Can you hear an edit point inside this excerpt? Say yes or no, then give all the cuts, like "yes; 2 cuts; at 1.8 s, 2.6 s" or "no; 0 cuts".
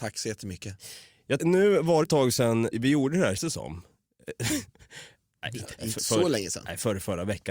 yes; 5 cuts; at 1.4 s, 2.0 s, 2.7 s, 3.4 s, 5.8 s